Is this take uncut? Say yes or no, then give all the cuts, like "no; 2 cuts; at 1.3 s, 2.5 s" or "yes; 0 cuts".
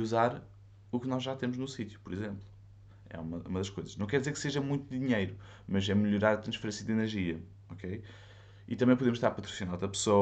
no; 1 cut; at 7.6 s